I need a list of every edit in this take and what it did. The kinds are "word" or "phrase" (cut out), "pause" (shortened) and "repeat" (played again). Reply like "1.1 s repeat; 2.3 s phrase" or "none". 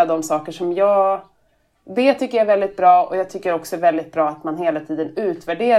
none